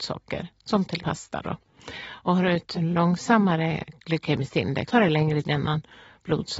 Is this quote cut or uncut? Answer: cut